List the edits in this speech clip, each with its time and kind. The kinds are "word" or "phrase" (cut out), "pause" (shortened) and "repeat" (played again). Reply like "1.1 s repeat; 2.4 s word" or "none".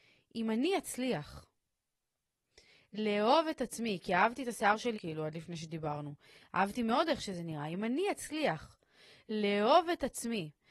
4.9 s word